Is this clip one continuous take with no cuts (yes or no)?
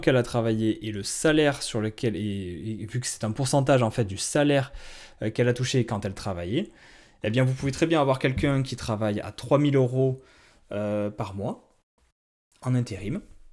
yes